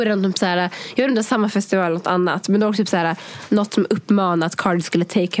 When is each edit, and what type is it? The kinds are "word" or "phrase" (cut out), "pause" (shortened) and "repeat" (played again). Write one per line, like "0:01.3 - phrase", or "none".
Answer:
none